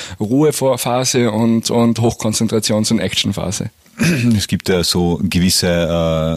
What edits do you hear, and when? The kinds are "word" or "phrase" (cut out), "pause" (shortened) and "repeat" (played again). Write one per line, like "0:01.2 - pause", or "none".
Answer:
none